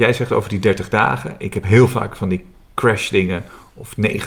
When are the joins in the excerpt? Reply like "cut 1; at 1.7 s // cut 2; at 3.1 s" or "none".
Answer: none